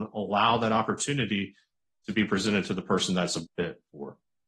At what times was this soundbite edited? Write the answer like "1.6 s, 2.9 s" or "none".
3.5 s